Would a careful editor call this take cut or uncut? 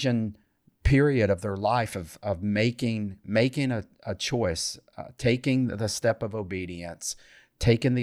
uncut